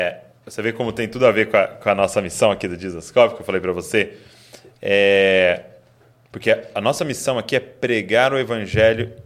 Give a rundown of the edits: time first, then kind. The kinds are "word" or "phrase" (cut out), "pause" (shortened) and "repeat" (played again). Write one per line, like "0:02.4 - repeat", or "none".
none

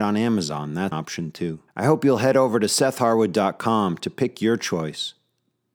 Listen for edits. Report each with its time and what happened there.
0:00.9 - word
0:01.7 - pause

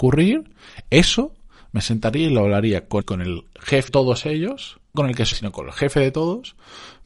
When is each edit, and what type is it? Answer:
0:03.0 - word
0:03.9 - word
0:04.9 - word
0:05.3 - word

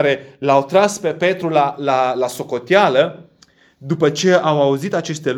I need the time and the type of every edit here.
none

